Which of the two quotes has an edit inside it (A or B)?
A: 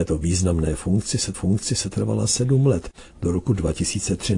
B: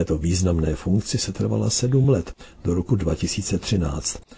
A